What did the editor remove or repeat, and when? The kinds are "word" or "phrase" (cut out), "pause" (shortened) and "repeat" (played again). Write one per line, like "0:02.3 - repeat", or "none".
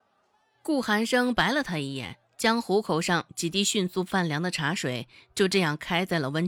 0:02.3 - pause